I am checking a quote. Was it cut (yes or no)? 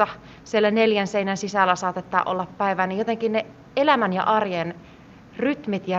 no